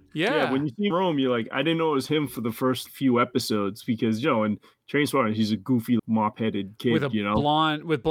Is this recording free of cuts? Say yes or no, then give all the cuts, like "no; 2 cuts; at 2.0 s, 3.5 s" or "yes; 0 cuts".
no; 3 cuts; at 0.9 s, 2.9 s, 6.0 s